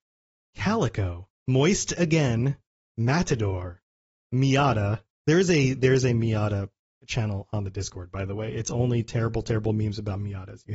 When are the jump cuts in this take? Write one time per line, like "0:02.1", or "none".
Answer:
0:01.4